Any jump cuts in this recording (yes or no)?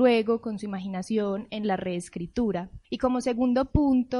yes